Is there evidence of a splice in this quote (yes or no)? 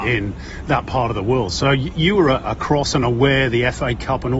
no